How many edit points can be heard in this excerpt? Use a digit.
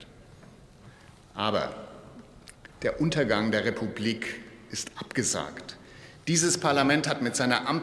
0